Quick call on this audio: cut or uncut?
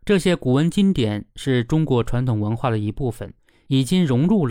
uncut